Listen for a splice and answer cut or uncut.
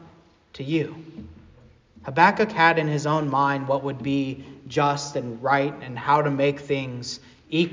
uncut